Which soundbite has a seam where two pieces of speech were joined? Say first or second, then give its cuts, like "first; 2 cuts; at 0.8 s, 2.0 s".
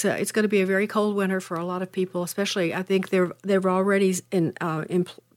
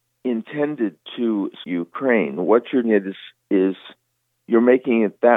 second; 2 cuts; at 1.6 s, 2.8 s